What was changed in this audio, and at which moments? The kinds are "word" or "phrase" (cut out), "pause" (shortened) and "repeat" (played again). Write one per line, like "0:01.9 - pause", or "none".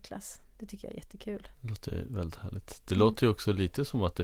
0:01.5 - pause